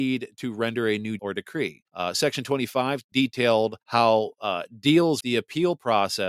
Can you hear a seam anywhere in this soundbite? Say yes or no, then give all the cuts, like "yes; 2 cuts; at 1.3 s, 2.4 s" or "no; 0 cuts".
yes; 5 cuts; at 1.2 s, 1.9 s, 3.1 s, 3.8 s, 5.2 s